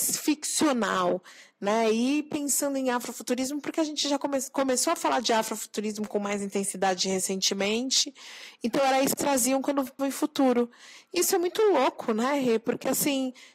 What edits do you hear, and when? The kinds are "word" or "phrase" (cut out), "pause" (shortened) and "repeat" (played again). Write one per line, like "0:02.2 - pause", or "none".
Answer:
0:09.2 - word
0:10.0 - word